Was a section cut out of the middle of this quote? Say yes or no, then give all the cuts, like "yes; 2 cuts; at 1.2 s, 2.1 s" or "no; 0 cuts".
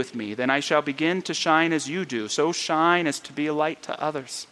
no; 0 cuts